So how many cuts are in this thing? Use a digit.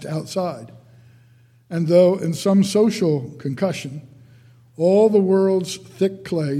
0